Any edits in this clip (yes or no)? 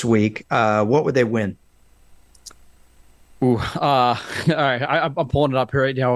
no